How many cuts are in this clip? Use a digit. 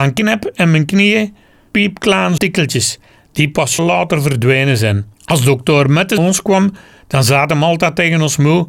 5